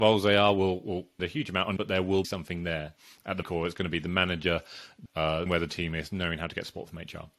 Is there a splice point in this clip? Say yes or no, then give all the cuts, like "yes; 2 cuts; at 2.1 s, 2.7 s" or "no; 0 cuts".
yes; 6 cuts; at 1.2 s, 1.8 s, 2.2 s, 3.4 s, 5.1 s, 5.5 s